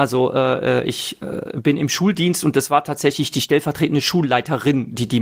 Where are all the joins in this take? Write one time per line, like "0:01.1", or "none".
none